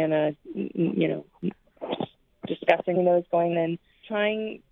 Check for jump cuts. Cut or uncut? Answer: cut